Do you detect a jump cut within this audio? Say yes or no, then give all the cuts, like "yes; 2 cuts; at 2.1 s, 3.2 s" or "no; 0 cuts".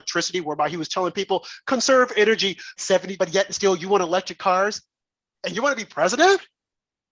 yes; 2 cuts; at 2.8 s, 3.2 s